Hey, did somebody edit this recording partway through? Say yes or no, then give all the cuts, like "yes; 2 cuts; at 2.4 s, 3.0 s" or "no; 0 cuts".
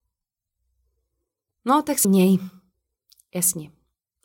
yes; 2 cuts; at 2.0 s, 2.7 s